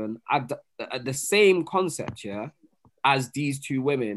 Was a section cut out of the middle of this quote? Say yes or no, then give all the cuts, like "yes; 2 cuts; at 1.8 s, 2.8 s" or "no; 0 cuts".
no; 0 cuts